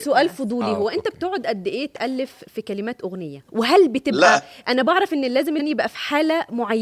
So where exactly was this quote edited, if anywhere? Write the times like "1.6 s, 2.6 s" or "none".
3.5 s, 5.6 s